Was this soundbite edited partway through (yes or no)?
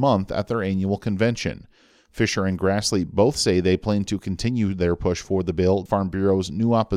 yes